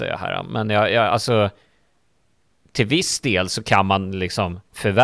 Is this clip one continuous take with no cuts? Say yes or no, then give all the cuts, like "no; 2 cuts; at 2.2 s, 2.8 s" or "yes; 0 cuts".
yes; 0 cuts